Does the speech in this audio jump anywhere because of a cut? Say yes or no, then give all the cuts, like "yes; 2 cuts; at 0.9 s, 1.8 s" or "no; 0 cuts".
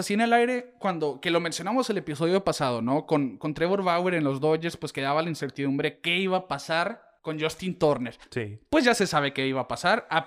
yes; 1 cut; at 7.2 s